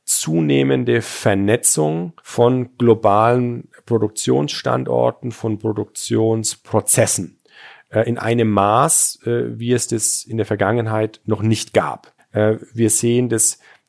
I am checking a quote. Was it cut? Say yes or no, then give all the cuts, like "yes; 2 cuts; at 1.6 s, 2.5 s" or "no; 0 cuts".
yes; 2 cuts; at 2.2 s, 12.2 s